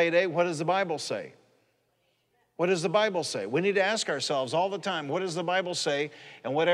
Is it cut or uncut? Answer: uncut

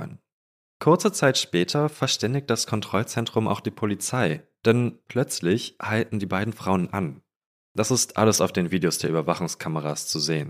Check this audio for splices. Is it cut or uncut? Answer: uncut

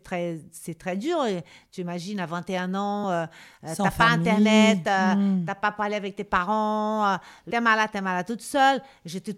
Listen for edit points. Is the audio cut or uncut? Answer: uncut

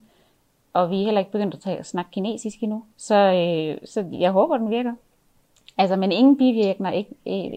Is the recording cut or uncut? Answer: cut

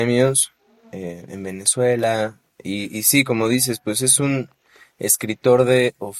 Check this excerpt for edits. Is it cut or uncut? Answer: cut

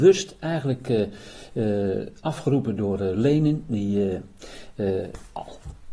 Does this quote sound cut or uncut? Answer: uncut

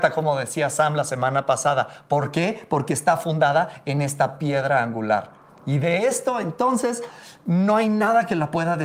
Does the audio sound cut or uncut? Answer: uncut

